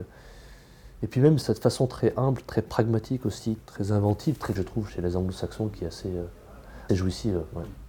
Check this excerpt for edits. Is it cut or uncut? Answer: cut